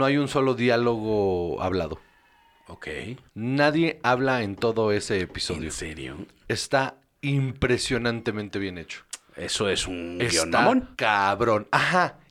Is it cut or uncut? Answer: cut